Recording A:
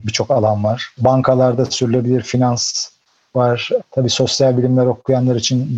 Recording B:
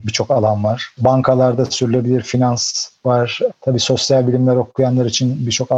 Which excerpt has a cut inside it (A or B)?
B